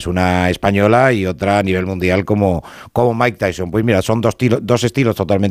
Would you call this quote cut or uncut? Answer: uncut